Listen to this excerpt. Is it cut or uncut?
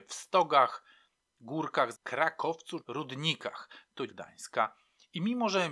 cut